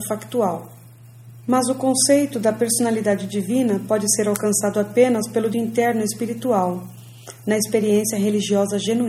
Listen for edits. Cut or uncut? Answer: cut